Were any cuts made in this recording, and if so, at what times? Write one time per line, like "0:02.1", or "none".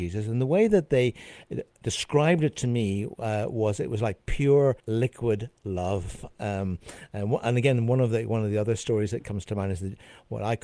0:04.8

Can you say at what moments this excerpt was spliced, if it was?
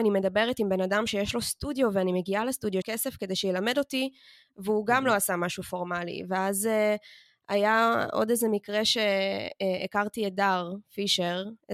0:02.8

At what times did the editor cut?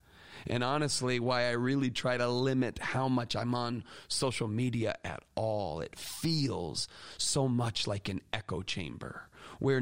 none

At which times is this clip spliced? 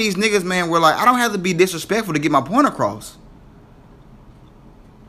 none

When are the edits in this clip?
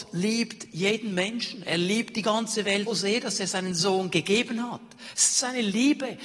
0:02.9

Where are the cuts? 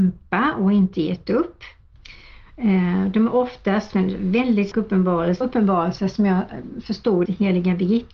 0:03.9
0:04.7
0:05.4
0:07.3

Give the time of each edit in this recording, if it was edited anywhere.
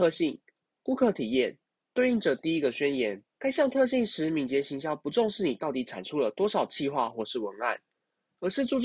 0:03.3

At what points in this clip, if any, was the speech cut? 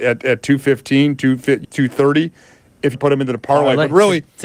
0:01.6
0:02.9

